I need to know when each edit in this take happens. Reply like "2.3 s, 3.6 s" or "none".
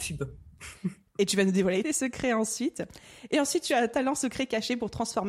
1.8 s